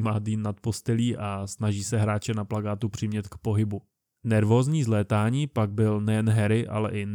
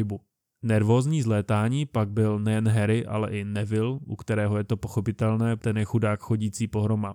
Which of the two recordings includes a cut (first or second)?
second